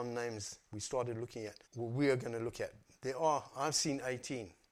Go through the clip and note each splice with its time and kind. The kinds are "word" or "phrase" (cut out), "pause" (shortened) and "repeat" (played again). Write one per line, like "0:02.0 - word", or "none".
0:01.6 - pause